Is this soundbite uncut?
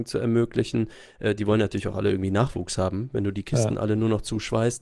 yes; 0 cuts

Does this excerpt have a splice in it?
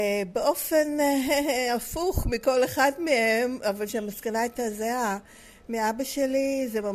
no; 0 cuts

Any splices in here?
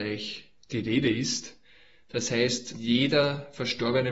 yes; 1 cut; at 2.7 s

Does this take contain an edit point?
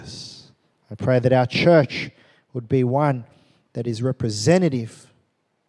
no; 0 cuts

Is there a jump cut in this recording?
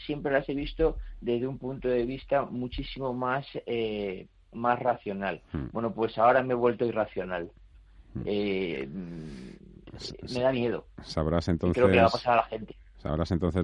no; 0 cuts

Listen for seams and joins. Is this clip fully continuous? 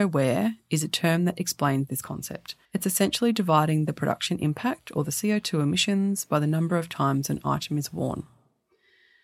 no; 1 cut; at 2.6 s

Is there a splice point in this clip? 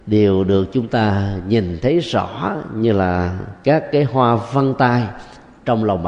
no; 0 cuts

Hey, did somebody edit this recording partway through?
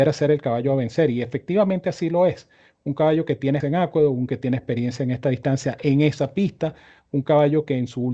yes; 2 cuts; at 3.6 s, 4.3 s

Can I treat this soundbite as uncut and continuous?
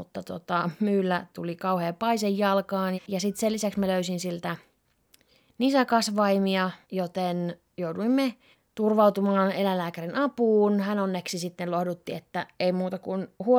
no; 3 cuts; at 2.9 s, 6.8 s, 8.5 s

